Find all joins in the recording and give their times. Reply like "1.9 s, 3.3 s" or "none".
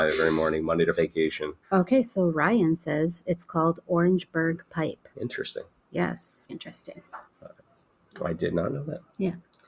0.9 s, 1.6 s, 5.1 s, 6.5 s, 7.3 s